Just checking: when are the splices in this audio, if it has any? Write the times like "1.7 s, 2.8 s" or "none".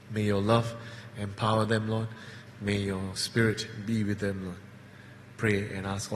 none